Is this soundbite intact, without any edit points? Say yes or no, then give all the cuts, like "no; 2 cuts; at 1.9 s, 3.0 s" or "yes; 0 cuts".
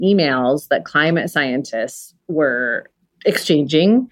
yes; 0 cuts